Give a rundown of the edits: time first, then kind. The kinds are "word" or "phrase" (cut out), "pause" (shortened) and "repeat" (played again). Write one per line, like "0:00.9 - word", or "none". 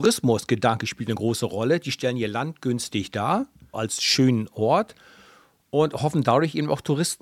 0:03.7 - word

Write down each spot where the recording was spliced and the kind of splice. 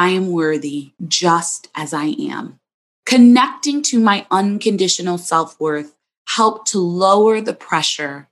0:01.0 - pause
0:02.9 - pause

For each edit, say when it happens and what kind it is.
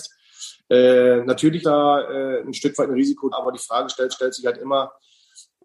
0:01.6 - word
0:03.3 - word
0:04.1 - repeat

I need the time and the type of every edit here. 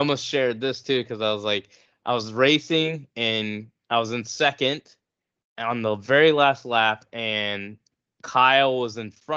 none

